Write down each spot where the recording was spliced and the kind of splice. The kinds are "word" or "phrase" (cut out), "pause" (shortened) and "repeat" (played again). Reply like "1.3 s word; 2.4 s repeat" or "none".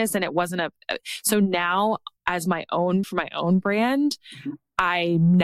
2.2 s pause; 3.0 s word